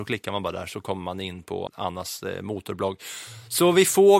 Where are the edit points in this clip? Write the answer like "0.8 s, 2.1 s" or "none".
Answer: 1.7 s

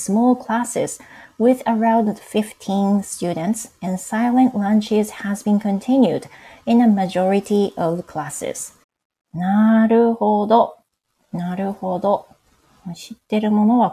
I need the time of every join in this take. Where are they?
8.8 s

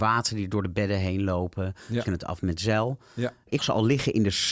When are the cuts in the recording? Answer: 2.1 s, 3.6 s

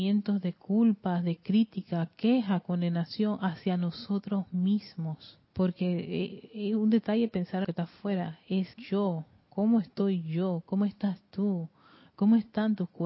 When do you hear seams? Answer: 5.4 s, 7.6 s, 8.7 s

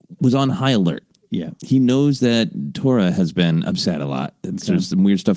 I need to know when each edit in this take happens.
none

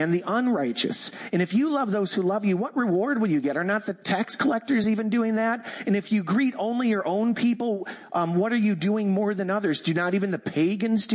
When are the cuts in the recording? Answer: none

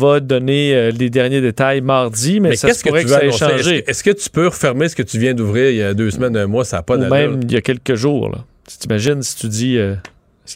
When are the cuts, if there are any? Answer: 6.1 s

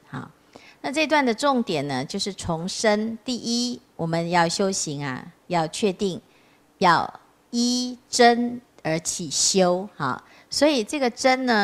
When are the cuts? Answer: none

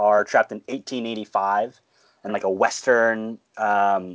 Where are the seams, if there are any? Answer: 2.3 s

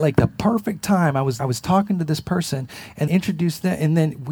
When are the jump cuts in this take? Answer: 1.4 s, 3.1 s

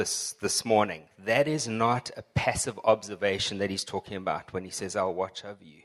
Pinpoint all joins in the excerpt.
none

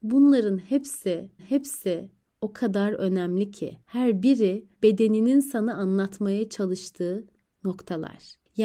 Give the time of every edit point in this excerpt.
1.4 s, 3.8 s, 4.7 s

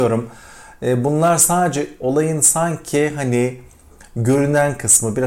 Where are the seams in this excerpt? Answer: none

